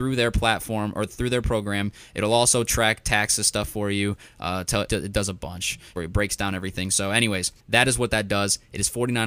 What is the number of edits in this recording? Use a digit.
3